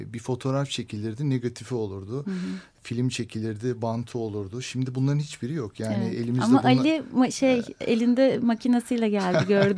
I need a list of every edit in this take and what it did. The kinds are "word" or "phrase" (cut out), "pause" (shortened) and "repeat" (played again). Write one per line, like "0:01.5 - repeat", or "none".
none